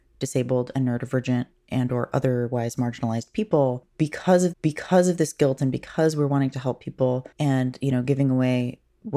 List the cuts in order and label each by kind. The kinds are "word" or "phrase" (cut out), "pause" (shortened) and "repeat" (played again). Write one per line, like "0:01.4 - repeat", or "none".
0:04.5 - repeat
0:07.3 - pause